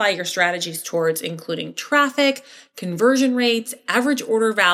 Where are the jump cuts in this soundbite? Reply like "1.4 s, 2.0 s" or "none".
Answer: none